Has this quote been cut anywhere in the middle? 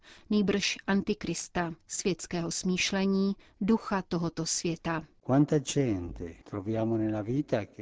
no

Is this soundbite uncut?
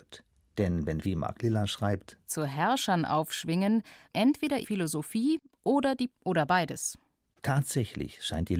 no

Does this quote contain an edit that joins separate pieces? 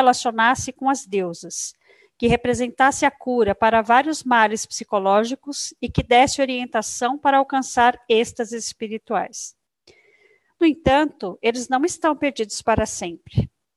no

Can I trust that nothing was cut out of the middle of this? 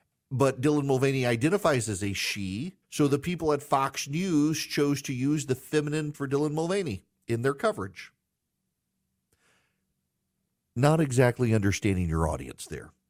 no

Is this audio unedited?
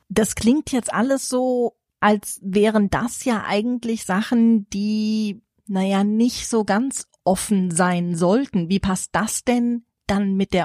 yes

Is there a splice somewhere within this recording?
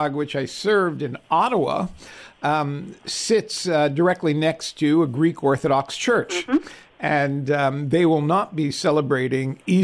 no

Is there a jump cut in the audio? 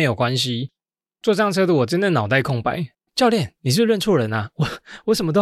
yes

